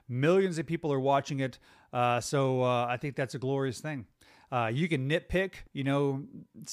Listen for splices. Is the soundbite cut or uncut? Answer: cut